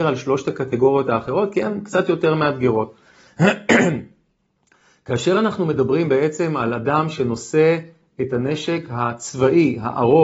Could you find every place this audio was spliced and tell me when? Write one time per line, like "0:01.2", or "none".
none

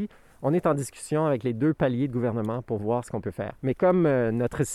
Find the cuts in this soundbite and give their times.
0:03.6

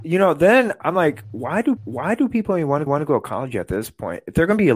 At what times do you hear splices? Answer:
0:01.8
0:02.9

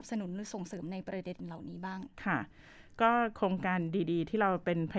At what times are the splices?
0:02.1

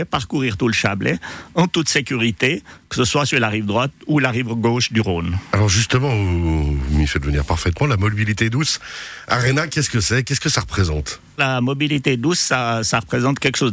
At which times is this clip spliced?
0:11.4

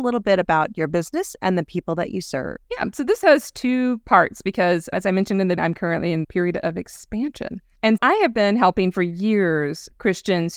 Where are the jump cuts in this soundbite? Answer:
0:02.6
0:05.6
0:06.2
0:08.0

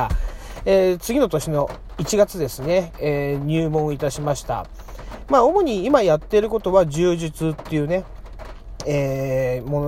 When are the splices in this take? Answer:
0:02.9

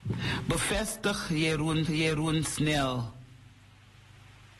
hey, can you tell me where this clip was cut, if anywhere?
0:01.9

